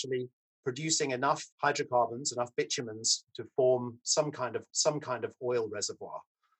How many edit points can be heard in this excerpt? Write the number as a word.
two